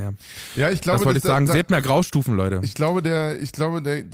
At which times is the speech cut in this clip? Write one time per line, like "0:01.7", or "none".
none